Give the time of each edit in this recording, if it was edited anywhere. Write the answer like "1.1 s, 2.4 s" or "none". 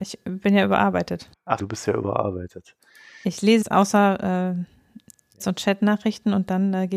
1.6 s, 3.6 s, 5.4 s